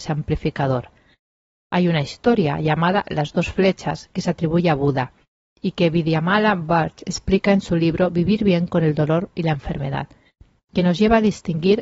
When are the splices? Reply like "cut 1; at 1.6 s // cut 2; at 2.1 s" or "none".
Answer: none